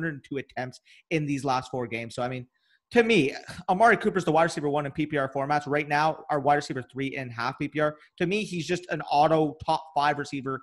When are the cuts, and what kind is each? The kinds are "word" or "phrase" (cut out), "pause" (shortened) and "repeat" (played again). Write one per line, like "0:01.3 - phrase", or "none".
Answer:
none